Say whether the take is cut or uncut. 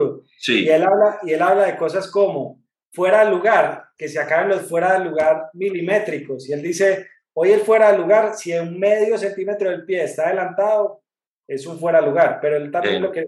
uncut